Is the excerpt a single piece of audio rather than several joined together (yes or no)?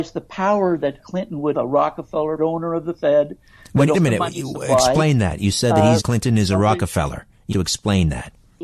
no